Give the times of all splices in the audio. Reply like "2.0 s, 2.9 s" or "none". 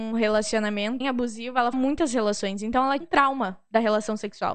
1.0 s, 1.7 s, 3.0 s